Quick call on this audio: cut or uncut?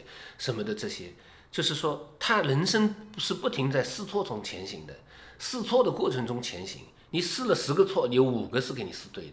uncut